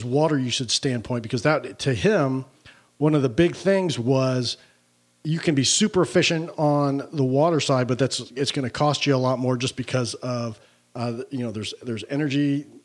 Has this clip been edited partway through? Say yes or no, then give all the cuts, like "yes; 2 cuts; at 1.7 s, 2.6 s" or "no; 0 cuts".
no; 0 cuts